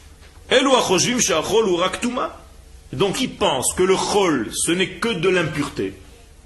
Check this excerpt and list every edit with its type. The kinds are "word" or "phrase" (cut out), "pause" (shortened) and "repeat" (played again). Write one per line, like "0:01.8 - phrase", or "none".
0:03.1 - word